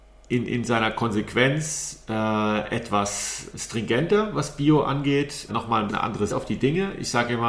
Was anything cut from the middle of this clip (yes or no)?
yes